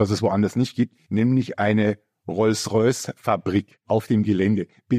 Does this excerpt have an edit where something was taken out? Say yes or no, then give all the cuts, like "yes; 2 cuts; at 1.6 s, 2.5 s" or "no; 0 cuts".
yes; 1 cut; at 3.8 s